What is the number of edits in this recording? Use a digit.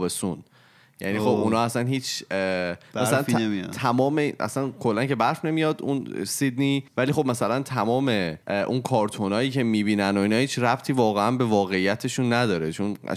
2